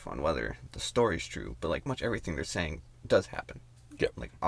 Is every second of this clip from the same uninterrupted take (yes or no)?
no